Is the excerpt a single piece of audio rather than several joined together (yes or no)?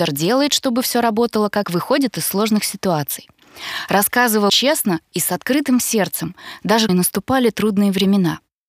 no